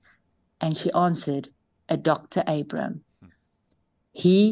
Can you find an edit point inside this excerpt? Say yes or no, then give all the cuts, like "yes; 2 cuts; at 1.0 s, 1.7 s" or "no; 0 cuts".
no; 0 cuts